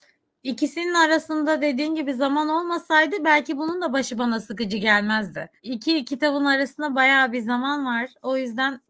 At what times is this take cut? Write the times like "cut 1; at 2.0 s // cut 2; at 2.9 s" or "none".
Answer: cut 1; at 5.6 s